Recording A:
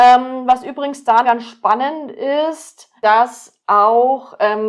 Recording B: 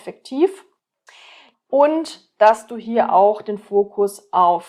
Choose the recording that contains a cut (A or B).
A